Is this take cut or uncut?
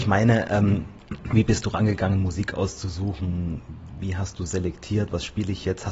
uncut